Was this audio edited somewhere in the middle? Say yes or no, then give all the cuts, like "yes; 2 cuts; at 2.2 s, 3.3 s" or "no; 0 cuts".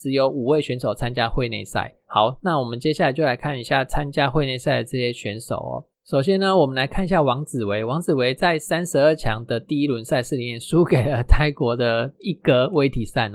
yes; 2 cuts; at 2.0 s, 5.9 s